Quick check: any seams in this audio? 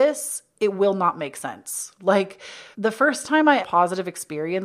yes; 2 cuts; at 2.7 s, 3.6 s

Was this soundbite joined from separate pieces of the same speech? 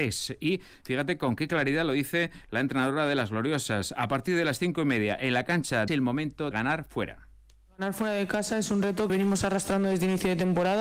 yes; 3 cuts; at 5.9 s, 6.5 s, 9.1 s

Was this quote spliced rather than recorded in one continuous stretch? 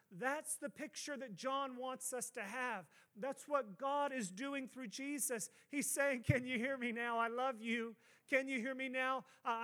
no; 0 cuts

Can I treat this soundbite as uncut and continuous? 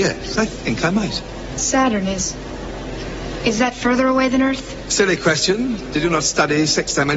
yes; 0 cuts

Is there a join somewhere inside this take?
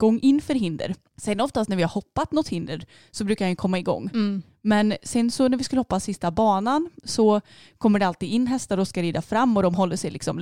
no; 0 cuts

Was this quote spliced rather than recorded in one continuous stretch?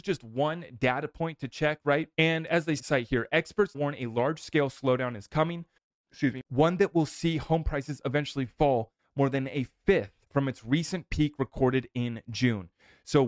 yes; 6 cuts; at 2.1 s, 2.8 s, 3.7 s, 5.8 s, 6.5 s, 10.2 s

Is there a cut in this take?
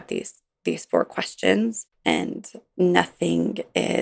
yes; 1 cut; at 1.9 s

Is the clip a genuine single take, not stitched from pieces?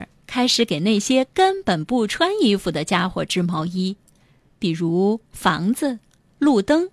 yes; 0 cuts

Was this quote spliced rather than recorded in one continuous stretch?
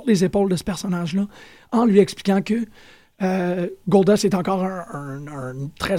no; 0 cuts

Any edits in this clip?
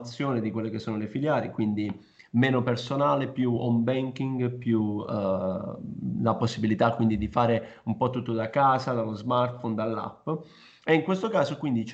no; 0 cuts

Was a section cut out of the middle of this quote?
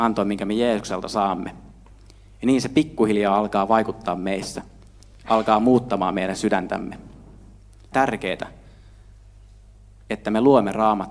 yes; 1 cut; at 7.9 s

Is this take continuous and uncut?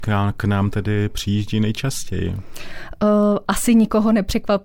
yes; 0 cuts

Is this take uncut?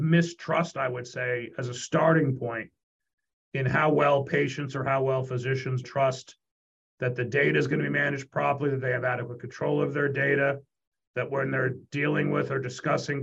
no; 1 cut; at 5.8 s

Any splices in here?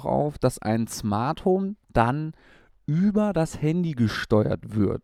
yes; 1 cut; at 1.8 s

